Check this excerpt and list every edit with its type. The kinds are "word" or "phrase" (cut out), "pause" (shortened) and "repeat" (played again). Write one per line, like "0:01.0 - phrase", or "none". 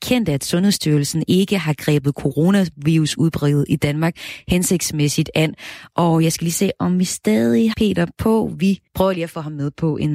0:07.7 - word
0:08.9 - pause

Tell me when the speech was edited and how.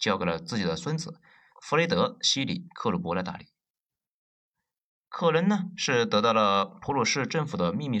none

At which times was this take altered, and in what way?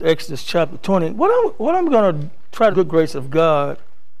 0:02.7 - phrase

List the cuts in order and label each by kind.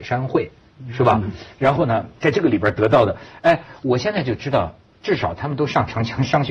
0:02.2 - pause

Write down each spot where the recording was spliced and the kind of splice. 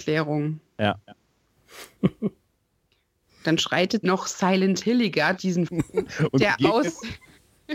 0:04.0 - word
0:05.4 - word
0:05.7 - word

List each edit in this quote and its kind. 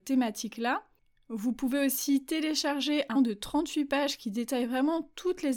0:03.1 - word

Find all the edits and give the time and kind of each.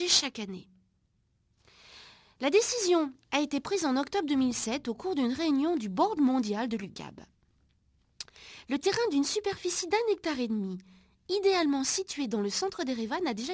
none

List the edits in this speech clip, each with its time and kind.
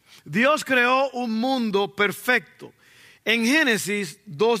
none

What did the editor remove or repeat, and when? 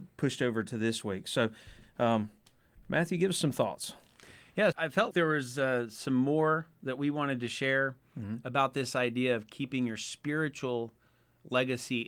0:04.7 - word
0:05.1 - word

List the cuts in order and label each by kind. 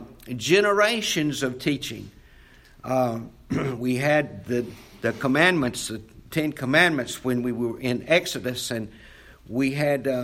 none

